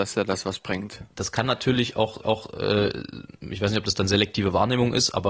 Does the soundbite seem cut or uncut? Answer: cut